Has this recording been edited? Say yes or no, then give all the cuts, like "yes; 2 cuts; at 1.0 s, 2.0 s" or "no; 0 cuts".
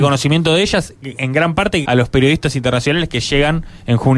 yes; 1 cut; at 1.8 s